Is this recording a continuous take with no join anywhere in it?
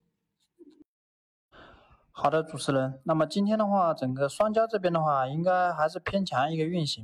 yes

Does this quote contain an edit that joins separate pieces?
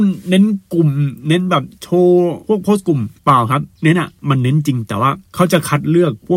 yes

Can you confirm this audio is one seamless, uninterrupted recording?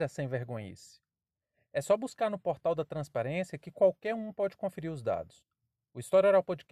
yes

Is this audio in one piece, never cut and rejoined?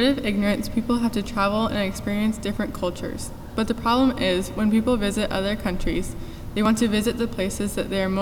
yes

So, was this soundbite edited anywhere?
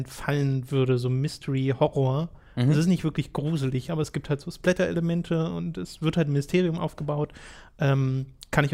no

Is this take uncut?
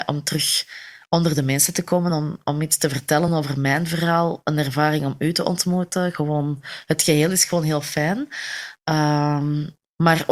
yes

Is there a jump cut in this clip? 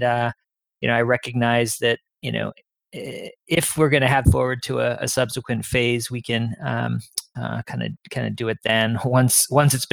yes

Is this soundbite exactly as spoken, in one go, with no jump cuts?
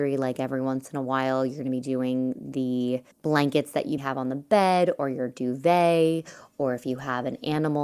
no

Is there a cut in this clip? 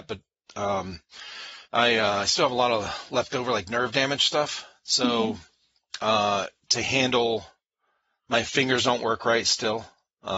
yes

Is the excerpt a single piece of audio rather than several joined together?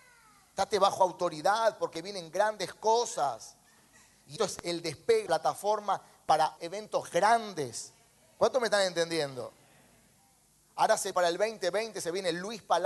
no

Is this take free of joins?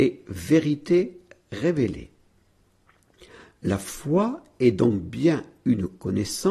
yes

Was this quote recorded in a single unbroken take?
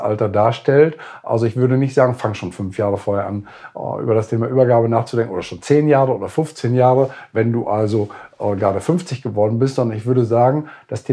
yes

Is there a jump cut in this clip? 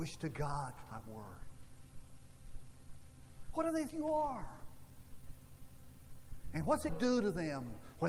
yes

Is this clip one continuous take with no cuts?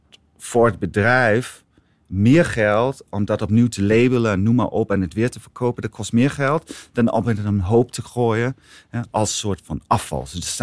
yes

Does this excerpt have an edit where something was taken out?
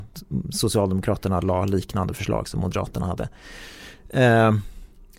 no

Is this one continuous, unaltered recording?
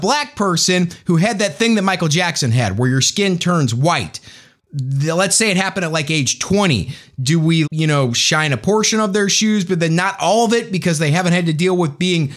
no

